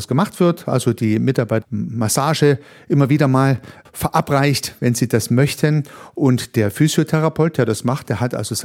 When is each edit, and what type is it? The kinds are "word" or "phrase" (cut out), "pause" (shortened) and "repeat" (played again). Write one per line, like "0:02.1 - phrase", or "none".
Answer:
0:01.6 - word
0:03.8 - word